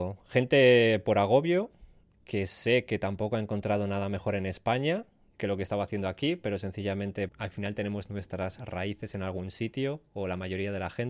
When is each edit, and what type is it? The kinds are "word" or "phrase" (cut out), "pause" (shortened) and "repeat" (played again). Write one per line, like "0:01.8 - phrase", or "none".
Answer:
0:07.3 - word